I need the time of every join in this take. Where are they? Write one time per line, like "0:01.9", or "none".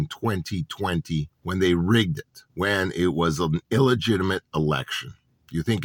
0:01.3
0:02.5